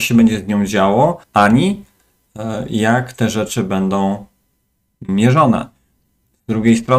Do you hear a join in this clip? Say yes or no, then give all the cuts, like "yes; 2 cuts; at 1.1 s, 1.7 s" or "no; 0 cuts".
yes; 1 cut; at 1.2 s